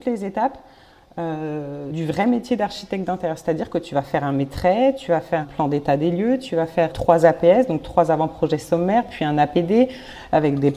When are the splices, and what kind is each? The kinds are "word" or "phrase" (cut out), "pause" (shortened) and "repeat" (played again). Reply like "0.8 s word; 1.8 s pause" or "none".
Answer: 1.9 s word; 5.4 s word; 6.9 s word